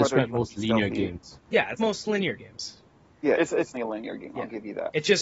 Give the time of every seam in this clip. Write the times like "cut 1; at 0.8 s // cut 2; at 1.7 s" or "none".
cut 1; at 1.8 s // cut 2; at 3.4 s // cut 3; at 3.7 s